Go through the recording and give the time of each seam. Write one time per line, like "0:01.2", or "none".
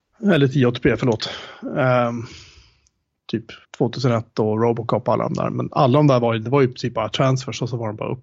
0:03.6